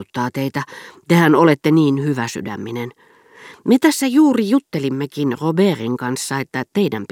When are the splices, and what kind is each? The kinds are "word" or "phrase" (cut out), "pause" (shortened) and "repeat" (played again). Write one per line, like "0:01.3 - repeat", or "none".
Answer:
none